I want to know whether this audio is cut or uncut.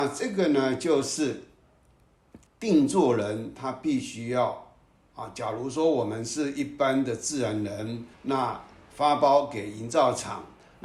cut